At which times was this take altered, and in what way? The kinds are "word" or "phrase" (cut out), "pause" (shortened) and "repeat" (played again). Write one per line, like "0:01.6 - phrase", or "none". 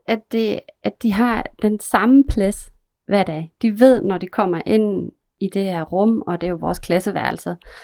none